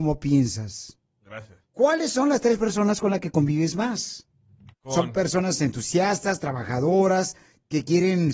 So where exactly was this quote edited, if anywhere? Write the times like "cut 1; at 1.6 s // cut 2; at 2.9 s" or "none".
cut 1; at 1.6 s